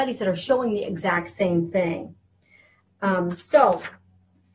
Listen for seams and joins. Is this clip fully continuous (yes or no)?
yes